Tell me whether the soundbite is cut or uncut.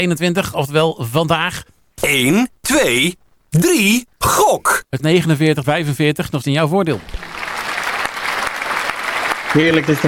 cut